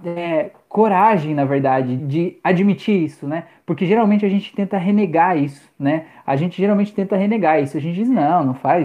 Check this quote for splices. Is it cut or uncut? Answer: cut